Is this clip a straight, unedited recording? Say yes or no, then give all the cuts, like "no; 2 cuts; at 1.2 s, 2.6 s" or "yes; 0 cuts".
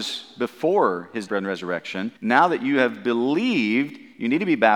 no; 2 cuts; at 1.3 s, 2.2 s